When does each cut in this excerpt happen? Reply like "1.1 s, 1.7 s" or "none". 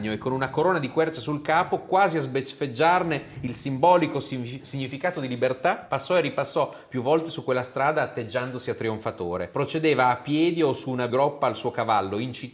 11.1 s